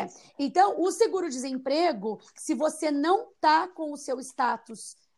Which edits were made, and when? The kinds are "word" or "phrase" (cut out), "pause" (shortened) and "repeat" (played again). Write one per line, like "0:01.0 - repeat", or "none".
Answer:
none